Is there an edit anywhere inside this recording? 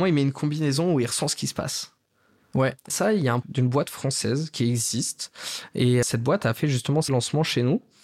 yes; 4 cuts; at 2.9 s, 3.4 s, 6.0 s, 7.1 s

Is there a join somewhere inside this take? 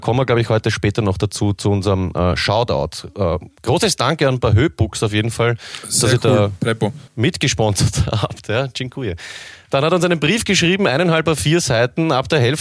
yes; 1 cut; at 7.1 s

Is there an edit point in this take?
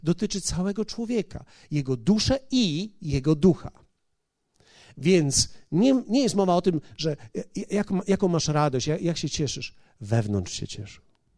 no; 0 cuts

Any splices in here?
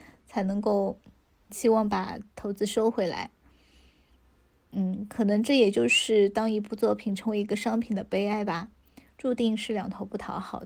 yes; 1 cut; at 1.5 s

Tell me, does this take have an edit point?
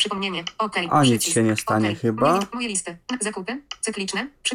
no; 0 cuts

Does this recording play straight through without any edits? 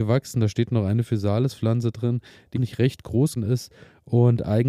no; 2 cuts; at 2.6 s, 3.4 s

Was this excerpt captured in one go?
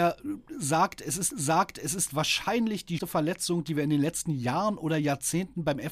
no; 2 cuts; at 1.3 s, 3.0 s

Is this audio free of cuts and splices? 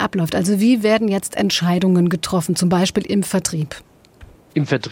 yes; 0 cuts

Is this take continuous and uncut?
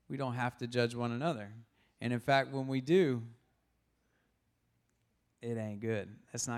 yes; 0 cuts

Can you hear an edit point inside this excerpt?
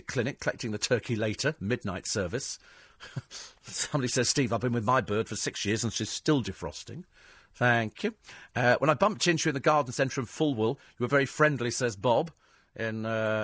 no; 0 cuts

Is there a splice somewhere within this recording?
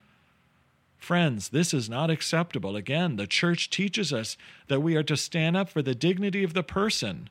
no; 0 cuts

